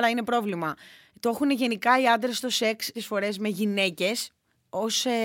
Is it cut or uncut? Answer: cut